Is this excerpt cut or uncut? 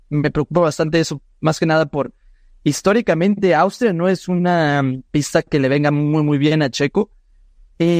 uncut